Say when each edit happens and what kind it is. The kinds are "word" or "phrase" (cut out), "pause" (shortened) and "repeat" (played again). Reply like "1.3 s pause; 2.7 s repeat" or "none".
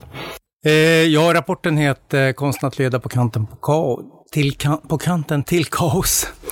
none